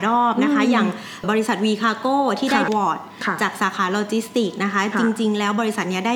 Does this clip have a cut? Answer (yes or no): yes